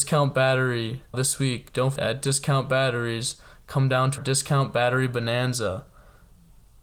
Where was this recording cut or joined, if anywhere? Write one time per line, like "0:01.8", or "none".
0:01.1
0:02.0
0:04.2